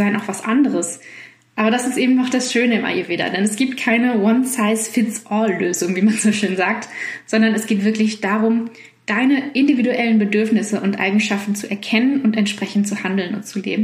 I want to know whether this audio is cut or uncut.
uncut